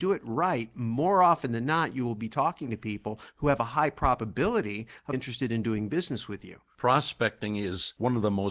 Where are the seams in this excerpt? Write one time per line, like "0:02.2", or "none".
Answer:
0:05.1